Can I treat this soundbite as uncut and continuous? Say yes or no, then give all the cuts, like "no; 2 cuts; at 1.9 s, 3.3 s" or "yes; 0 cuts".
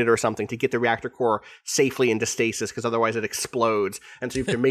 yes; 0 cuts